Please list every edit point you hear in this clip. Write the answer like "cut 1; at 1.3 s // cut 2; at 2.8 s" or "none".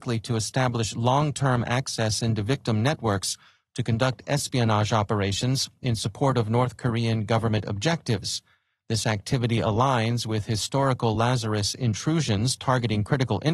none

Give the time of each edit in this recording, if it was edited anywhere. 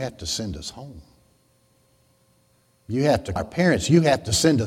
cut 1; at 3.4 s

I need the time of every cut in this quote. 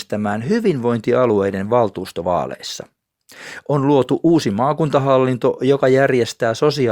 none

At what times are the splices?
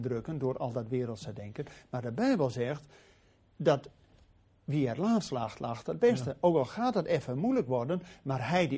none

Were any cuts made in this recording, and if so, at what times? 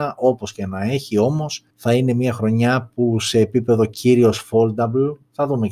cut 1; at 1.7 s

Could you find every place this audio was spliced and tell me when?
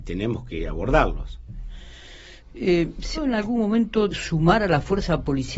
cut 1; at 3.1 s // cut 2; at 4.1 s

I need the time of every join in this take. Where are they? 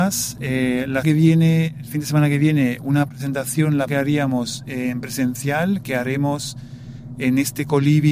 cut 1; at 1.0 s // cut 2; at 3.9 s

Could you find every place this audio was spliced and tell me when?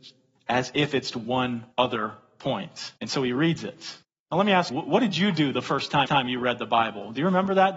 cut 1; at 1.1 s // cut 2; at 1.7 s // cut 3; at 3.0 s // cut 4; at 4.0 s // cut 5; at 4.7 s // cut 6; at 6.1 s

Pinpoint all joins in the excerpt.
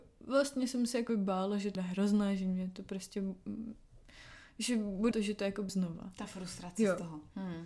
cut 1; at 1.1 s // cut 2; at 1.8 s // cut 3; at 5.1 s // cut 4; at 5.7 s

